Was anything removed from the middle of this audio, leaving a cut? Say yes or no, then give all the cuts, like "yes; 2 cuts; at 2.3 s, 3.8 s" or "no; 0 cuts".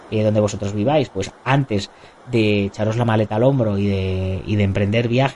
no; 0 cuts